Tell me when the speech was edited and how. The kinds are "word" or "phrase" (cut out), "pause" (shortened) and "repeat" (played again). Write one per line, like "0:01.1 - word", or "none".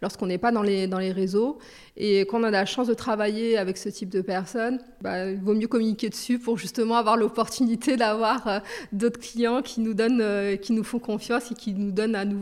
none